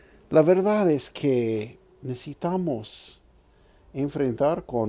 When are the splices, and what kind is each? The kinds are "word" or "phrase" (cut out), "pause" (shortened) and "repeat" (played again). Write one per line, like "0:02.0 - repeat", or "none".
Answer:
none